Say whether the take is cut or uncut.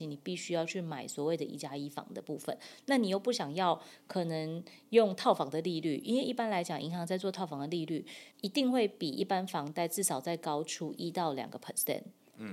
cut